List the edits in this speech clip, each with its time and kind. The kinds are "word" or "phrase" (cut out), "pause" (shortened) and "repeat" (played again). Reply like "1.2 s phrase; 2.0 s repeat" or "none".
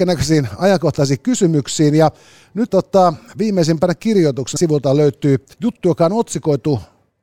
2.7 s word; 4.6 s word; 5.5 s pause